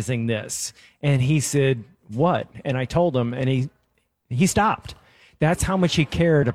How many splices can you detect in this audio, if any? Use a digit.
0